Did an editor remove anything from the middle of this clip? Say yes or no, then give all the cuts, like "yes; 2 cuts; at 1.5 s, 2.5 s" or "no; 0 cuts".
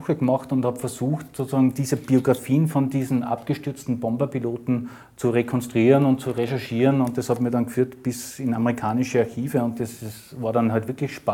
no; 0 cuts